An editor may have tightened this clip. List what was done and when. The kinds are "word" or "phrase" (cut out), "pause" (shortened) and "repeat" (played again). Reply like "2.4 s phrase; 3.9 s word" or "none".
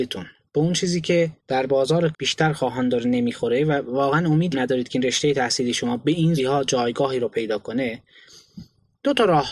1.4 s pause; 2.1 s word; 4.5 s word; 6.4 s word